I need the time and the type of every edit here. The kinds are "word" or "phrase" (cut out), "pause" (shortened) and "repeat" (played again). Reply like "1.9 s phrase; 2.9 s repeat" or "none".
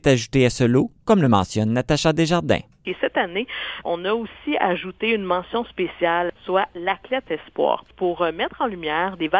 none